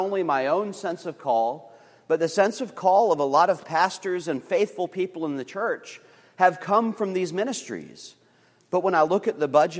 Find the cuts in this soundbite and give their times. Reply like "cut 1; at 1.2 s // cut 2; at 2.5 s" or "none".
none